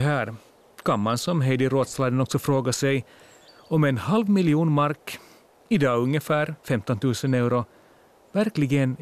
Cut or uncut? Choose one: uncut